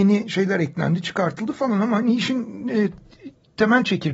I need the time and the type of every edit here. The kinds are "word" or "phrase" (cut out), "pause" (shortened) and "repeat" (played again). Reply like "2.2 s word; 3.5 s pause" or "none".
none